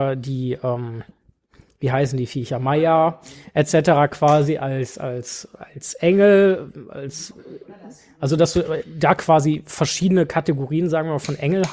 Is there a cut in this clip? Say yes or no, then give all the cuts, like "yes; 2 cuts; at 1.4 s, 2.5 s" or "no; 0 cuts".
no; 0 cuts